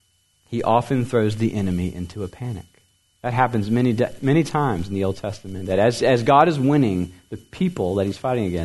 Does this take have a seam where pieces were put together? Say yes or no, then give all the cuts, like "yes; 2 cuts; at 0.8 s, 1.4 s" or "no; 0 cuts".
no; 0 cuts